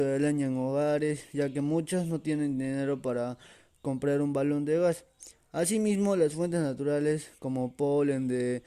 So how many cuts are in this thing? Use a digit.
0